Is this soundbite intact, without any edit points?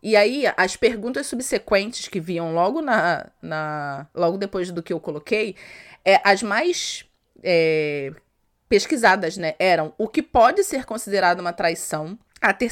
yes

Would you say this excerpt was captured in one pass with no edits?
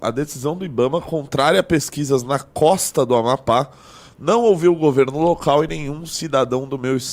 yes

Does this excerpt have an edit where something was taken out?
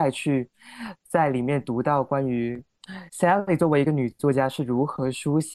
yes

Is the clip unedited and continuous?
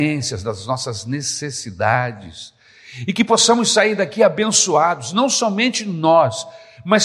yes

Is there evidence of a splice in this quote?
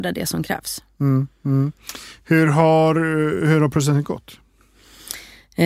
no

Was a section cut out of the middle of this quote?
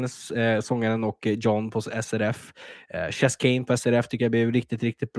no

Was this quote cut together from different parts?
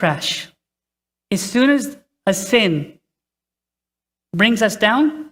no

